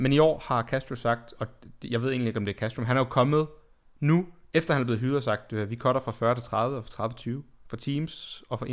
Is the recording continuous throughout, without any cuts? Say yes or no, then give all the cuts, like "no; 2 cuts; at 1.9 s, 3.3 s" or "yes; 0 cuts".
yes; 0 cuts